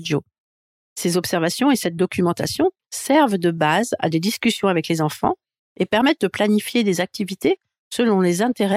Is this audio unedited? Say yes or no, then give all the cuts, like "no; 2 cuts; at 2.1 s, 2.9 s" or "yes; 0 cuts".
yes; 0 cuts